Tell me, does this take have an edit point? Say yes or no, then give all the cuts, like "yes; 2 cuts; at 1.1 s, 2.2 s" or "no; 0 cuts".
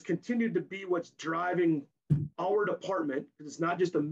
no; 0 cuts